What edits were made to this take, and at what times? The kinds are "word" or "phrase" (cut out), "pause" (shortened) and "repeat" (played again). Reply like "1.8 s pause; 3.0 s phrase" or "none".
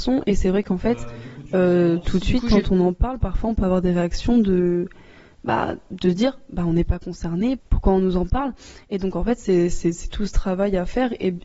none